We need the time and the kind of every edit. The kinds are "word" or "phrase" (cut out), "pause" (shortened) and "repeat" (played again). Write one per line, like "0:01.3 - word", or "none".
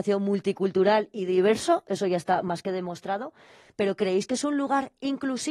none